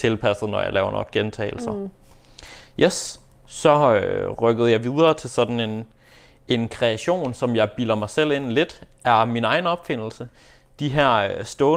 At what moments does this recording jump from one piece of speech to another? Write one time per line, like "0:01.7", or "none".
none